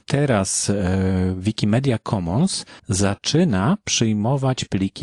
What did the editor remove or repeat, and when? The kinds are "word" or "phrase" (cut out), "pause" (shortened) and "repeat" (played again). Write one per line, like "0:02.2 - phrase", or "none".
0:02.8 - pause